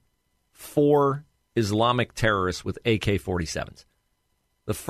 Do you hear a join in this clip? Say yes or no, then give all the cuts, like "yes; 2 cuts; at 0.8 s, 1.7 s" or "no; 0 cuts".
no; 0 cuts